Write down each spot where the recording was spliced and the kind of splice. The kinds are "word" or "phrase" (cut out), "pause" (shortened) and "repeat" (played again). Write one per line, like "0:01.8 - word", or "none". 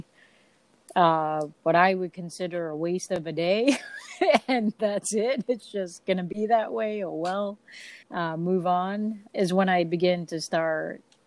0:01.5 - pause
0:08.0 - pause
0:09.3 - word